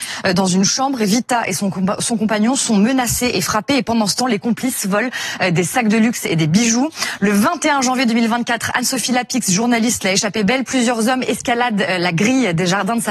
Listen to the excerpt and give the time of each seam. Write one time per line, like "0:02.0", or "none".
none